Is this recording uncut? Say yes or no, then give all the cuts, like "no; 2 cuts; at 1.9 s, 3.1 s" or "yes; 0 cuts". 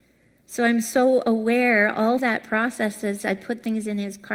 no; 1 cut; at 2.2 s